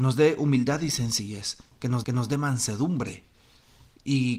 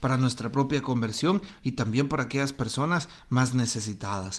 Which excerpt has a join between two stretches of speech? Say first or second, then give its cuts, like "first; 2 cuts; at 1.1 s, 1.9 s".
first; 1 cut; at 2.0 s